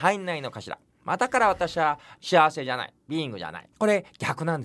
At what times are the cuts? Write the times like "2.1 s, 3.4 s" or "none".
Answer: 2.2 s, 3.7 s